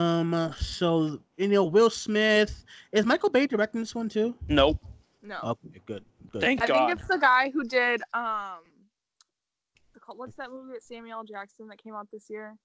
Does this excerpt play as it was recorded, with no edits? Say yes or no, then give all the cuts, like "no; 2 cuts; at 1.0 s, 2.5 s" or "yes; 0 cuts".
yes; 0 cuts